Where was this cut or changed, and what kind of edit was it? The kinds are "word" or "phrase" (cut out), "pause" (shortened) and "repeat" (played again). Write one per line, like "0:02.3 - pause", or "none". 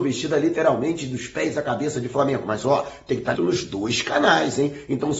0:03.4 - word